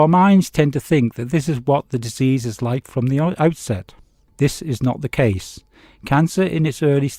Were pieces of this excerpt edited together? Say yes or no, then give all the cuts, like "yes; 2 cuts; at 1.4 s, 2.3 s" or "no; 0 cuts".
no; 0 cuts